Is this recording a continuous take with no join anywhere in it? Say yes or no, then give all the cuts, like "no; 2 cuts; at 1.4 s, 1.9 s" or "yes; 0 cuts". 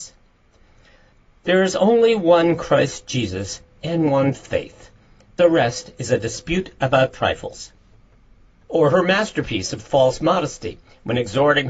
yes; 0 cuts